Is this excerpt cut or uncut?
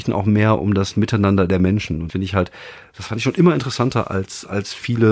cut